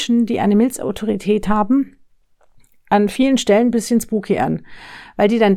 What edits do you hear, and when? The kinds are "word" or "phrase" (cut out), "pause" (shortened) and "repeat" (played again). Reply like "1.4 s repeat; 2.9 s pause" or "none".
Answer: none